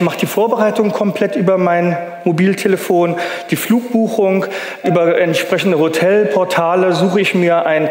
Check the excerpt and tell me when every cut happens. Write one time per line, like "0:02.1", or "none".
0:04.8